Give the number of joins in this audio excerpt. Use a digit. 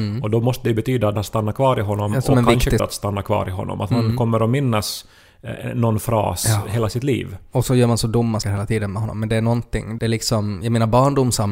4